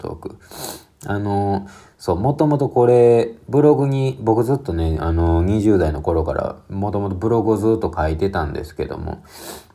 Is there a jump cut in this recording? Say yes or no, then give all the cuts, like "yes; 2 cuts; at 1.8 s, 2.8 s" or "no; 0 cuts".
no; 0 cuts